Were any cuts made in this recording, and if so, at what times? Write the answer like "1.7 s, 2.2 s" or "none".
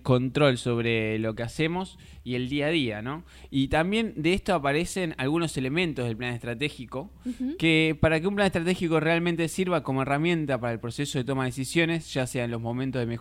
none